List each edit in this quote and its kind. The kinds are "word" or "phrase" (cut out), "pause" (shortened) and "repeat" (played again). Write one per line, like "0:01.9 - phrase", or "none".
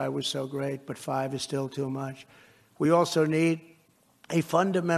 none